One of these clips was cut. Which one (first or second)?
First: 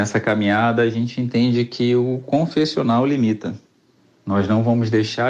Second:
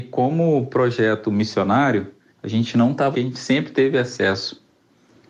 second